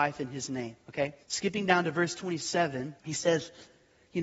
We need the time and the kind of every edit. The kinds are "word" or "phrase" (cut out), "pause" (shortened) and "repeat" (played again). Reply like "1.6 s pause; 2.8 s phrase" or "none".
1.2 s pause; 3.0 s pause